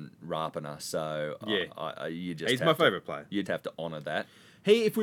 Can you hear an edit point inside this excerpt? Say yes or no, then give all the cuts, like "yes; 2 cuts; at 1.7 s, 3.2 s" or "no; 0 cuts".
yes; 1 cut; at 3.4 s